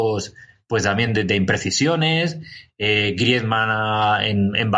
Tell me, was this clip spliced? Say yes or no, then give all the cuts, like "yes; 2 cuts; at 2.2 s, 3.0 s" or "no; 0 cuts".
no; 0 cuts